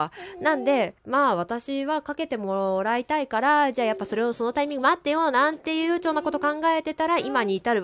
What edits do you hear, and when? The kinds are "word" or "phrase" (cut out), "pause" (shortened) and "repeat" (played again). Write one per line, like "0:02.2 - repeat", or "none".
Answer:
0:01.0 - pause